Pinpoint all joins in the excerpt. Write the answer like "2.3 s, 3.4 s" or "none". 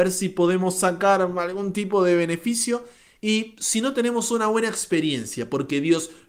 none

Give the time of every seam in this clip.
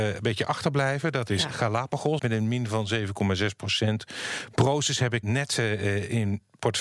2.2 s, 5.2 s

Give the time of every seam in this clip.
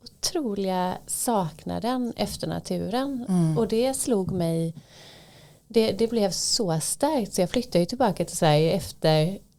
none

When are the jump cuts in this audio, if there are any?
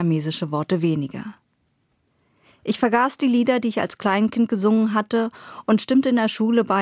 none

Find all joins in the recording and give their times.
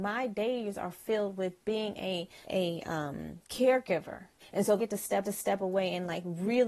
2.4 s, 4.4 s, 4.8 s, 5.2 s

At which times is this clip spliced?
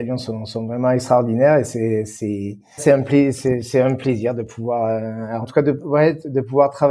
2.8 s, 5.4 s

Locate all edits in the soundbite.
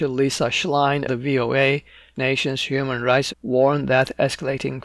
1.1 s, 2.1 s, 3.3 s

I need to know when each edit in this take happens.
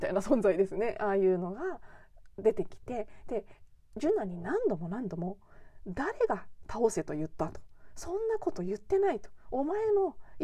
none

